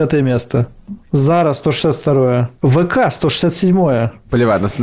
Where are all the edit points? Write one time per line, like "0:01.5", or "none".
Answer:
0:01.0
0:02.6